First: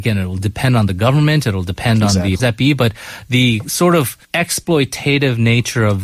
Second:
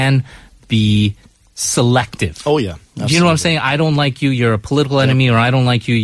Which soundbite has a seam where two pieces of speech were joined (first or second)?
first